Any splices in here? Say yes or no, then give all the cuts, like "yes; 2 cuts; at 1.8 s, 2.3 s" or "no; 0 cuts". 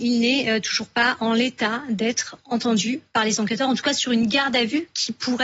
no; 0 cuts